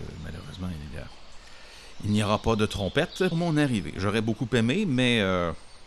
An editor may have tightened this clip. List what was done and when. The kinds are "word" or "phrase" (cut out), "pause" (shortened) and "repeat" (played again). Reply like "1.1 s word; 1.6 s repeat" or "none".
3.3 s word